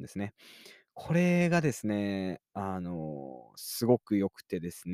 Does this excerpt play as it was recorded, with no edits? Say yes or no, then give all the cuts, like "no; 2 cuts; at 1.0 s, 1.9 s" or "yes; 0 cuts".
no; 1 cut; at 2.4 s